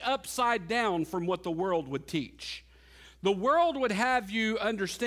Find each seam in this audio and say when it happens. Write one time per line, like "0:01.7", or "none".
none